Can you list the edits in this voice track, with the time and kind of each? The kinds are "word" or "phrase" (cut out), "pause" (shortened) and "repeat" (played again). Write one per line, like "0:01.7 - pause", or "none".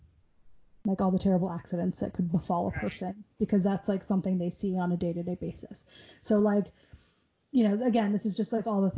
none